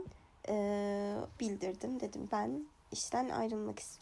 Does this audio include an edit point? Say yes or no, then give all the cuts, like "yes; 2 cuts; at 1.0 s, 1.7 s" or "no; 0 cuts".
yes; 2 cuts; at 1.4 s, 2.3 s